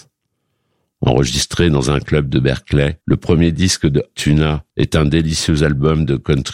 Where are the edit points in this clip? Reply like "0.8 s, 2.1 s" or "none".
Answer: 3.0 s, 4.1 s, 4.7 s